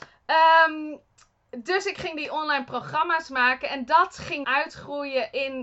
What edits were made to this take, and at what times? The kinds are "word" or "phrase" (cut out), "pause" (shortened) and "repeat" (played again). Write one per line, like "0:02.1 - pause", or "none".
0:04.4 - word